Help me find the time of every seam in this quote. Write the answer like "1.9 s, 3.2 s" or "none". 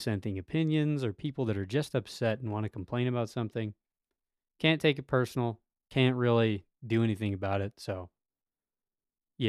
none